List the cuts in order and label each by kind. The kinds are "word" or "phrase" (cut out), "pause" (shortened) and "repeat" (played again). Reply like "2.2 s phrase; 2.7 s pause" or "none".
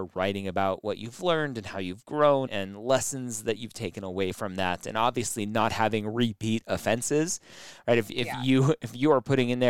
2.5 s word